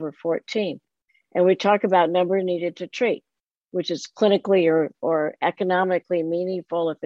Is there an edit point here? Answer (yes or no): no